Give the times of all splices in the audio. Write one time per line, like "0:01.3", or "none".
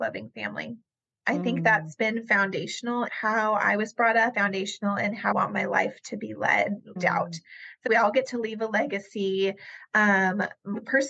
0:03.1
0:04.3
0:05.3
0:07.0
0:07.9